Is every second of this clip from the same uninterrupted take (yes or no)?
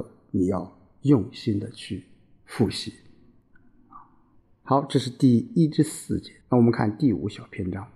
no